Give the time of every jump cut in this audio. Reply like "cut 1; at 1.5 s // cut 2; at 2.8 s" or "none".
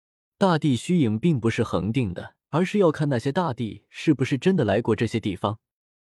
cut 1; at 2.4 s